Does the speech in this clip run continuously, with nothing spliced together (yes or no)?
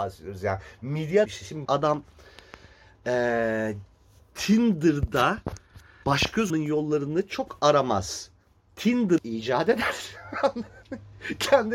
no